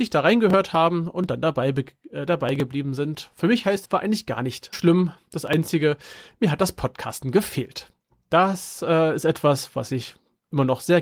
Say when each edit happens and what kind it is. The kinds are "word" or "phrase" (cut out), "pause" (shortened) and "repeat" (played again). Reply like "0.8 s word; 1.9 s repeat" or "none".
3.9 s phrase; 4.7 s word